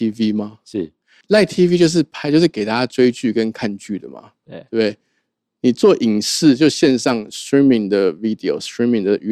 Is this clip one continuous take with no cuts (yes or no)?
yes